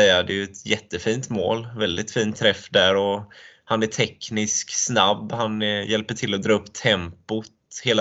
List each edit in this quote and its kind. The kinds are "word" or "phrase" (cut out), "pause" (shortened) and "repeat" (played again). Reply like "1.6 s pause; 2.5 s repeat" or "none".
none